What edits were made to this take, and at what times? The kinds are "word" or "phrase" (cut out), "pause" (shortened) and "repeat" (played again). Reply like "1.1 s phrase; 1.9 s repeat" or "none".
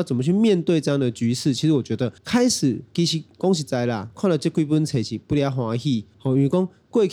2.2 s pause; 6.1 s pause